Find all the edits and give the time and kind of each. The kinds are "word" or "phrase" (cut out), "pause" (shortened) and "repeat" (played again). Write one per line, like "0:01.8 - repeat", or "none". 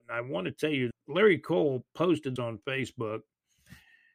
0:00.9 - word
0:02.4 - word